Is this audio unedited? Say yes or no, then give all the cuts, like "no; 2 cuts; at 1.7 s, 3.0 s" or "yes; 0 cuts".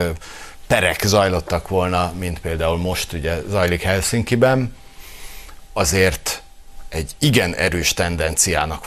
yes; 0 cuts